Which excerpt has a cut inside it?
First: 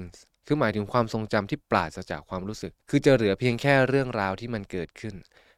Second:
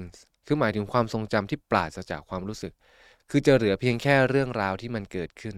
first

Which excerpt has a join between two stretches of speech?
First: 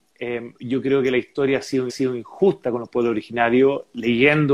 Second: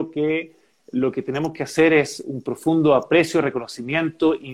first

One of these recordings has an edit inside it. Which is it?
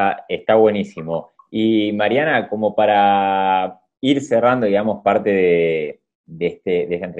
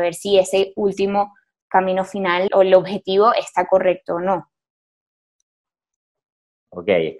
second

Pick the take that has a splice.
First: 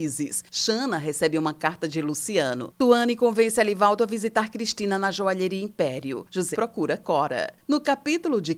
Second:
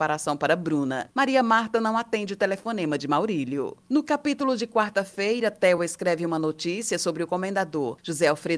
first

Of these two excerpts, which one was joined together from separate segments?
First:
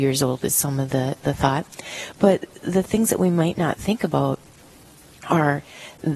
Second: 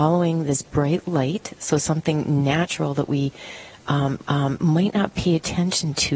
second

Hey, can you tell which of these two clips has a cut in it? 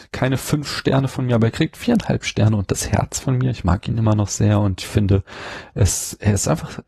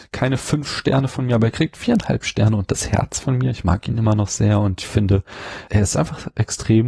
second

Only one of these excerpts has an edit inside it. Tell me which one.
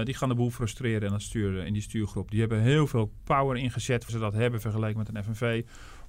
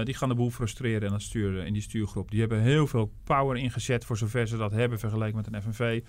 first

